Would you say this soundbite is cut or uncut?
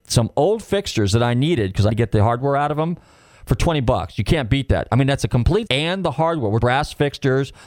cut